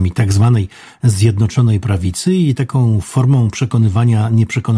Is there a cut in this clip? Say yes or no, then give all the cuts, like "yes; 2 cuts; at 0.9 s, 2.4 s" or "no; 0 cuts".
no; 0 cuts